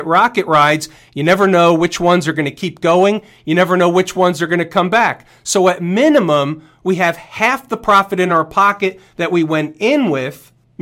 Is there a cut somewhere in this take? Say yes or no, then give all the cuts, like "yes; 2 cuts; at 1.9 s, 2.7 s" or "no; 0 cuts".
no; 0 cuts